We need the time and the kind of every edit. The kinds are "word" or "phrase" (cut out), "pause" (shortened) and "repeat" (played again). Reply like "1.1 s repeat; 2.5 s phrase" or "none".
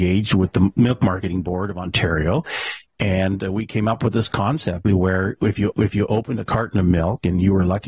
4.8 s word; 5.7 s repeat